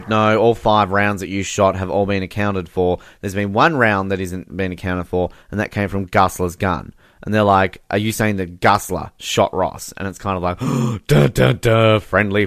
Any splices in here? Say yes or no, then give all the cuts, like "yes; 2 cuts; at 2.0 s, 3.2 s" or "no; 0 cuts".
yes; 1 cut; at 4.5 s